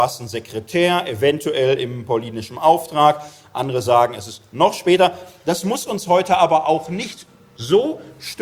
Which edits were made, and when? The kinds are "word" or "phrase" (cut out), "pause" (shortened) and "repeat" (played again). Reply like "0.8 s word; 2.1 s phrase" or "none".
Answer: none

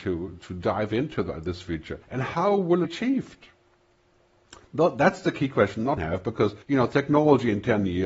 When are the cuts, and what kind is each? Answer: 2.0 s pause; 2.8 s phrase; 6.0 s phrase; 6.6 s pause

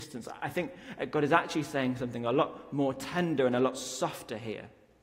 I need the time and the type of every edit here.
none

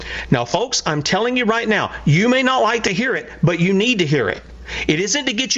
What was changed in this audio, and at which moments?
none

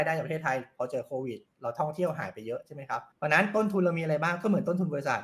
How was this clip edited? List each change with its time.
3.1 s pause

